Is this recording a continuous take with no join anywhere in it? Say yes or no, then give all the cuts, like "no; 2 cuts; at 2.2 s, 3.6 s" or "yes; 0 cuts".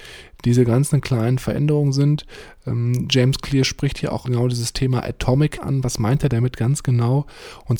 no; 2 cuts; at 4.3 s, 5.6 s